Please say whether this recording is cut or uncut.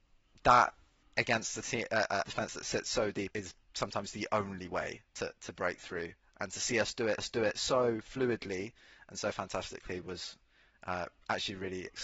cut